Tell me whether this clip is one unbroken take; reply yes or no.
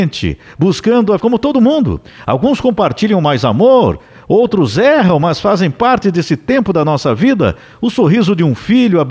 no